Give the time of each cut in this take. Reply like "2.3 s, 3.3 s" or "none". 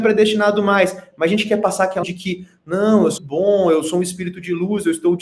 2.0 s, 3.2 s